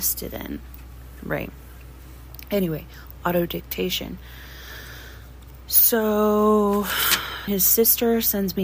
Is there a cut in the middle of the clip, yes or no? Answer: yes